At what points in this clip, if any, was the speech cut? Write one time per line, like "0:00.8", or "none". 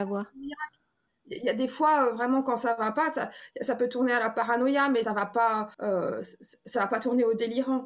0:05.0
0:05.7